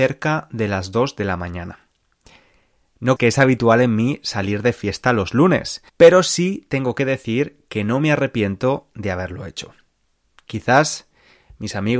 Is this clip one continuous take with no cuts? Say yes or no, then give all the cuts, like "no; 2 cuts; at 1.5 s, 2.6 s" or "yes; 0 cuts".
no; 2 cuts; at 3.2 s, 5.9 s